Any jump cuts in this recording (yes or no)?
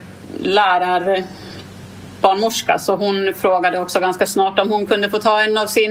no